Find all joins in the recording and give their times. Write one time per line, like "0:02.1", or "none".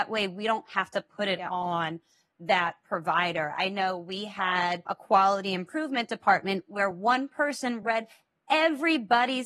none